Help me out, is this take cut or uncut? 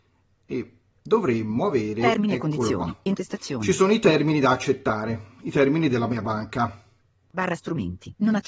uncut